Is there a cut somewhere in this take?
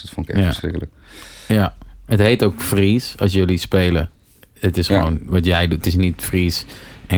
no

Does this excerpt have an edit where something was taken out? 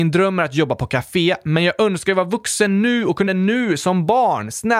yes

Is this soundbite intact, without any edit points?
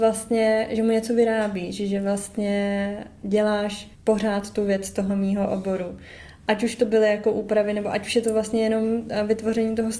no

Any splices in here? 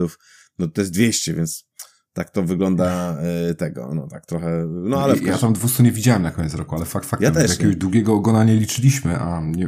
no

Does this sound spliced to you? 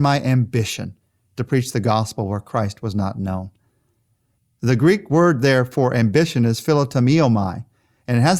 no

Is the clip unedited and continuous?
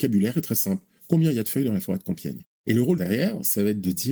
no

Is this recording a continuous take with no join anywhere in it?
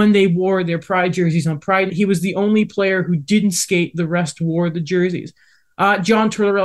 no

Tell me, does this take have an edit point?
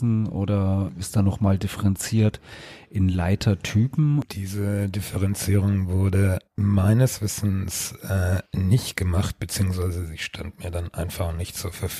yes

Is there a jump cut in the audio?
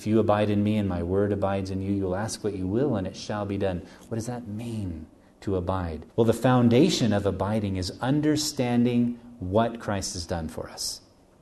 yes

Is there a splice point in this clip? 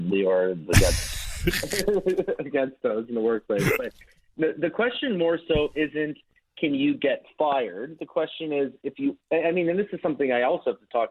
no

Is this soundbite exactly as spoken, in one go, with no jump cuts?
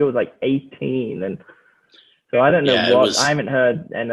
yes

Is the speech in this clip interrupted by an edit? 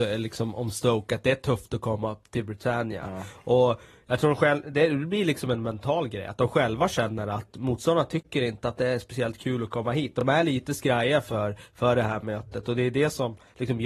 no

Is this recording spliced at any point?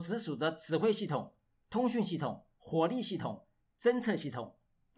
no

